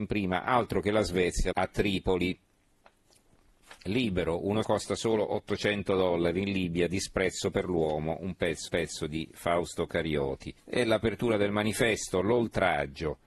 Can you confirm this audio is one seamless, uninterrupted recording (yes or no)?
no